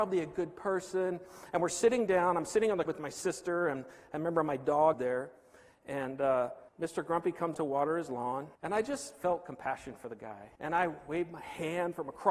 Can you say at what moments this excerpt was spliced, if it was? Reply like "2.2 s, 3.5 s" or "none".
2.9 s, 4.9 s, 6.7 s, 7.5 s, 8.5 s, 10.6 s